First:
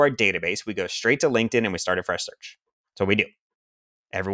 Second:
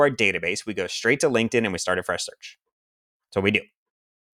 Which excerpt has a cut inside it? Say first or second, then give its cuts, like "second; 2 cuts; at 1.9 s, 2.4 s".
first; 1 cut; at 2.8 s